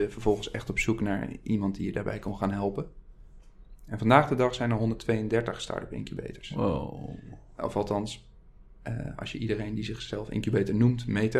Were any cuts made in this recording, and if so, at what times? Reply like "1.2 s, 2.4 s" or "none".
none